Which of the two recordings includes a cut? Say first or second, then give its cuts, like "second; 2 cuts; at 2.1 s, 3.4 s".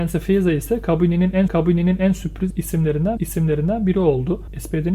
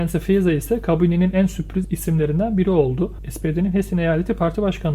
first; 2 cuts; at 1.5 s, 3.2 s